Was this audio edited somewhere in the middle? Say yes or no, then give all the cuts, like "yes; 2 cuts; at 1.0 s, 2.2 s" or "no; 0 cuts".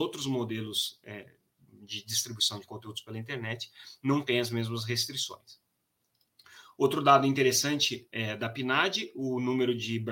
no; 0 cuts